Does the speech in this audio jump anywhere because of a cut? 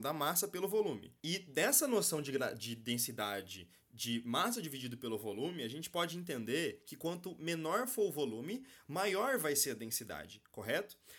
no; 0 cuts

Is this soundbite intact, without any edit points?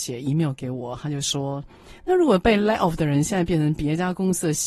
no; 1 cut; at 2.0 s

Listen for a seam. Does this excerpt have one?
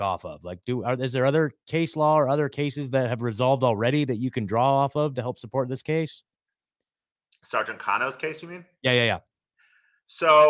no; 0 cuts

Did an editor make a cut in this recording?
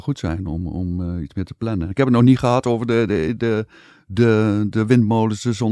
no; 0 cuts

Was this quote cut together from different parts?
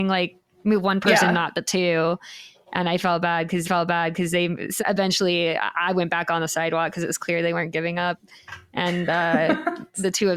yes; 2 cuts; at 3.6 s, 4.8 s

